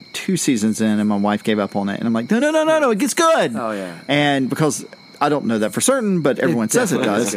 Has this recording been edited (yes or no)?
no